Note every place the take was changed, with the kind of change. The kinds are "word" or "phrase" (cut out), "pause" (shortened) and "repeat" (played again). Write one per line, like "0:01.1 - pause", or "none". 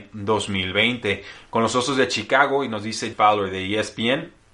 0:03.1 - word